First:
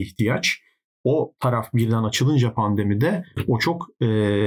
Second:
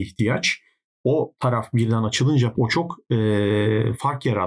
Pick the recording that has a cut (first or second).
second